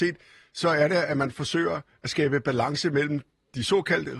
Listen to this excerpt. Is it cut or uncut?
uncut